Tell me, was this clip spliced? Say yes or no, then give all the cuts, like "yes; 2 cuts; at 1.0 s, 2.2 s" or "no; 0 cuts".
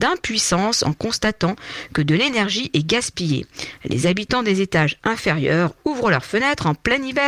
no; 0 cuts